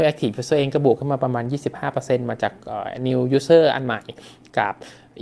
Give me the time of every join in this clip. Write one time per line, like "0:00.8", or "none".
none